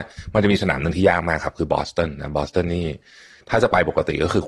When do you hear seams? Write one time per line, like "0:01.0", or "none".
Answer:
none